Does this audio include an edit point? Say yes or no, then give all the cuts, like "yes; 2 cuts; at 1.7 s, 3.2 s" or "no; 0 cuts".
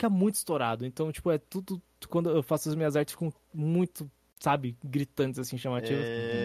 no; 0 cuts